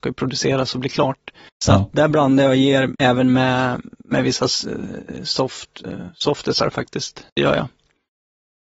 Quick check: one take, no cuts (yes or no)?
no